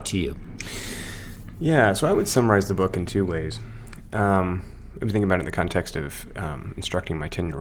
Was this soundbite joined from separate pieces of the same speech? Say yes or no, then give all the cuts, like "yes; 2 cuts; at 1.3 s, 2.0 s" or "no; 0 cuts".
yes; 1 cut; at 5.1 s